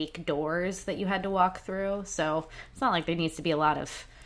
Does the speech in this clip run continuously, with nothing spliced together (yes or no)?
yes